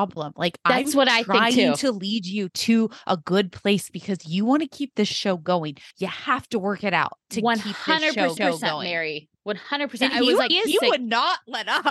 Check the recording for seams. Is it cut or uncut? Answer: cut